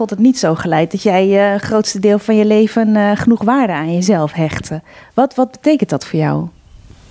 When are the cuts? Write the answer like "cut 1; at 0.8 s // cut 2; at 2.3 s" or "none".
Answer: none